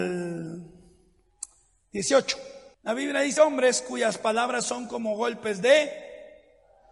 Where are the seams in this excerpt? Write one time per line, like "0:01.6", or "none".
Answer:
0:02.7
0:03.4